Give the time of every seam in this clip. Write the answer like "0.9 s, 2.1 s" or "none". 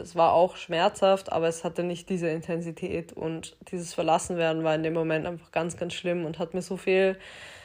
none